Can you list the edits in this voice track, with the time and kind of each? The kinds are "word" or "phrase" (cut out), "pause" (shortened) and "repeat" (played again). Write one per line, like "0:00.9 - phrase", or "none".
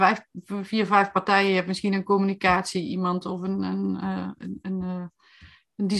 none

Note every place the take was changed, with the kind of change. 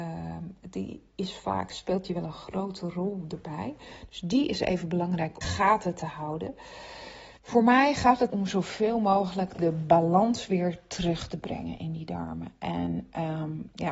0:05.4 - phrase
0:07.4 - pause
0:08.3 - phrase

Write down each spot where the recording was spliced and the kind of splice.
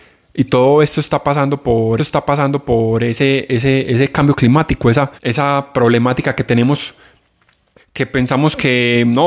0:02.0 - repeat
0:05.2 - pause
0:07.8 - phrase

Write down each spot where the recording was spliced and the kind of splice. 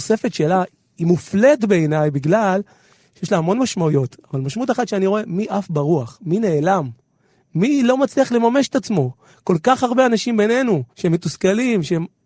0:10.9 - pause

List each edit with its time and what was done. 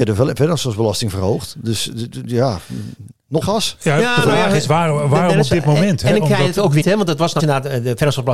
0:03.4 - word
0:06.8 - word
0:07.4 - word

